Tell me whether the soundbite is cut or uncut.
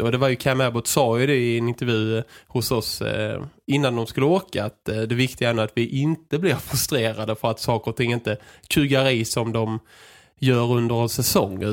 uncut